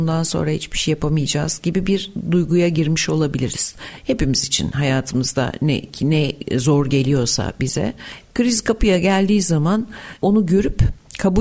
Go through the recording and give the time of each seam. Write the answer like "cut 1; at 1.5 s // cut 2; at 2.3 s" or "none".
none